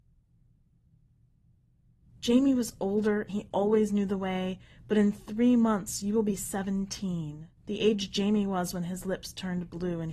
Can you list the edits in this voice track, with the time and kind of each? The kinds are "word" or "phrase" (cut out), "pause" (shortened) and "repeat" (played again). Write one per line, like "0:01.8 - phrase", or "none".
0:03.3 - word
0:07.6 - pause